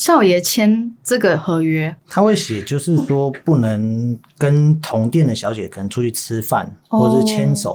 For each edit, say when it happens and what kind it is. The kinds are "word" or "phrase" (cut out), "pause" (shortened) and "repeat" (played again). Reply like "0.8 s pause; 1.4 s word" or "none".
2.0 s pause

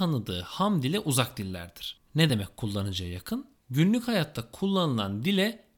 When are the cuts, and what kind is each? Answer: none

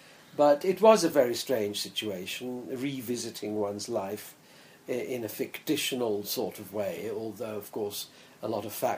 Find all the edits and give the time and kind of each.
none

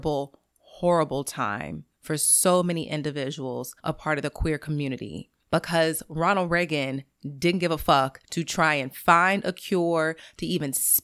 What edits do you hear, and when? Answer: 1.9 s pause; 3.8 s pause; 5.4 s pause; 8.2 s pause

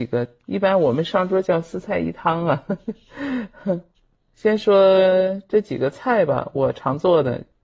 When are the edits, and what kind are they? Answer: 3.9 s pause

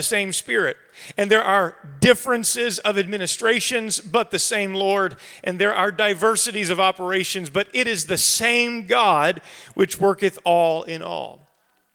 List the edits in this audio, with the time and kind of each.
none

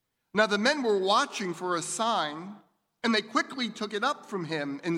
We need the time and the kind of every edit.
none

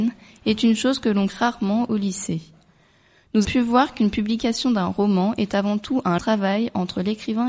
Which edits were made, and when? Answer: 1.3 s word; 3.4 s word; 6.2 s word

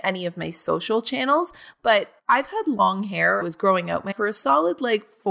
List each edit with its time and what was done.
2.2 s pause; 3.4 s phrase; 4.1 s word

